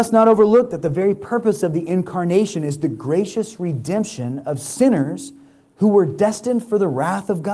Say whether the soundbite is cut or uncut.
uncut